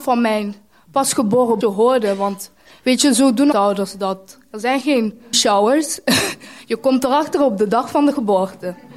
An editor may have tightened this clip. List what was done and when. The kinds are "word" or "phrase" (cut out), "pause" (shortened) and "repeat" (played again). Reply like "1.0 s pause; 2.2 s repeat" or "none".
1.6 s word; 3.5 s word; 5.3 s word